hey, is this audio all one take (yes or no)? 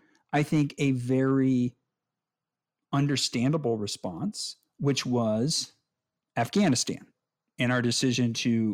yes